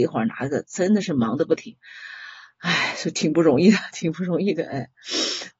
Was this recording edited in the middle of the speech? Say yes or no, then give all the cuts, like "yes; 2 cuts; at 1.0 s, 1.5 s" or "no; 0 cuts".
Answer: no; 0 cuts